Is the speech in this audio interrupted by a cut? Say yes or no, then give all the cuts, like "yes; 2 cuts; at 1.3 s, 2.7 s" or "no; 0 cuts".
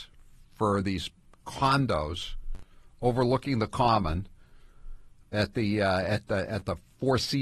no; 0 cuts